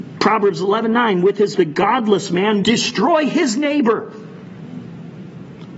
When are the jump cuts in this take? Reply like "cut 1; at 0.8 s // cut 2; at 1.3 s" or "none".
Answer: cut 1; at 1.5 s // cut 2; at 2.6 s